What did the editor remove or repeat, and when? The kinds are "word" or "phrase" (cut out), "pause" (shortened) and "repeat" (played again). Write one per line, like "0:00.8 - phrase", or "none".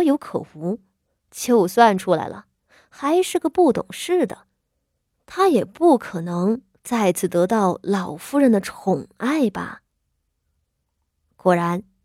none